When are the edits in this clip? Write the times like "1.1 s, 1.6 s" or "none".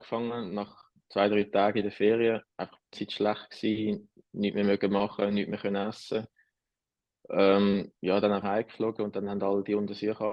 1.0 s, 2.5 s, 2.9 s, 8.0 s, 8.4 s